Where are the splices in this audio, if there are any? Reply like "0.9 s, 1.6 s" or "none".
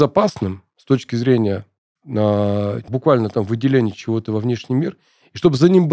2.9 s